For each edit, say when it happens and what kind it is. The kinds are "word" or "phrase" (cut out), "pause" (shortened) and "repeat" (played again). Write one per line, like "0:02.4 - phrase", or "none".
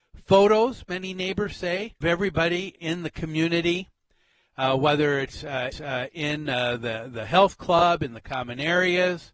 0:02.0 - word
0:02.8 - word
0:05.7 - repeat